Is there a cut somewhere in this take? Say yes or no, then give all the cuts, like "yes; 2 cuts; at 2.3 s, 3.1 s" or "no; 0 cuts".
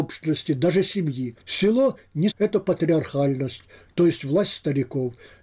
yes; 2 cuts; at 1.4 s, 2.3 s